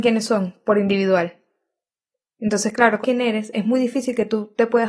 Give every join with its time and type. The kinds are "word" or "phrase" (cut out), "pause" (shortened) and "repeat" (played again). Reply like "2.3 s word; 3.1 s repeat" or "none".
3.0 s phrase

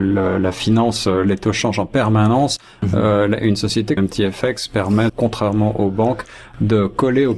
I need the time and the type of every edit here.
4.0 s word; 5.1 s word

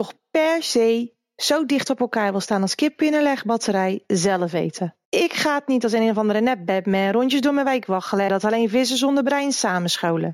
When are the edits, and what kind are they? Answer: 5.0 s pause; 8.3 s phrase

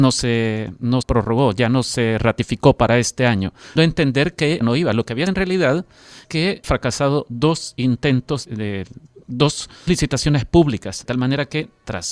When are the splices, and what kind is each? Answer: 1.0 s word; 3.8 s word; 4.6 s word; 5.3 s word; 6.2 s word; 6.6 s word; 8.4 s word; 9.9 s word; 11.0 s word

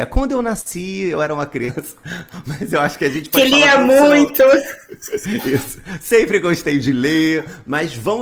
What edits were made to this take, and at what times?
none

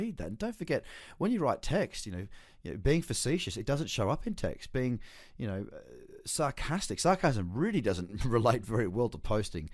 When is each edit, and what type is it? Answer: none

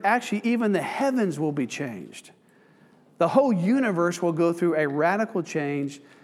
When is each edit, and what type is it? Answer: none

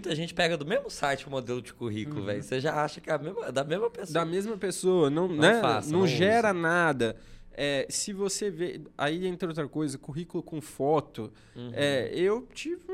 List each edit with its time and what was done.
5.3 s word

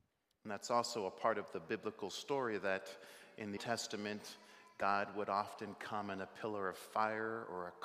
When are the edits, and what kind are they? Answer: 3.6 s word

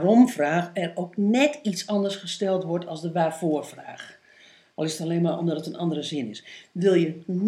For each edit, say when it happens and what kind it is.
none

